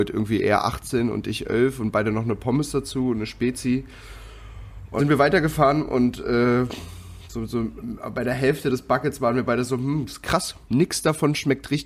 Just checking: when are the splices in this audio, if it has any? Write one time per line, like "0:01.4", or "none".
0:05.0